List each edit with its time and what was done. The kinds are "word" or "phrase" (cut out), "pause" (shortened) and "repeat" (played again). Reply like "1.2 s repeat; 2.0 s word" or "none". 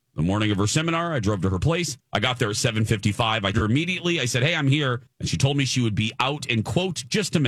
2.0 s pause; 3.5 s word; 5.1 s pause